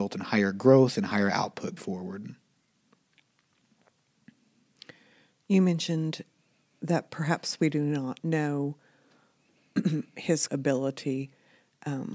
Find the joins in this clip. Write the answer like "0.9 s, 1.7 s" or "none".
1.8 s, 10.5 s